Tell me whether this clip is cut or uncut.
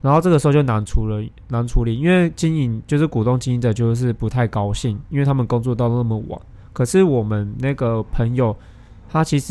cut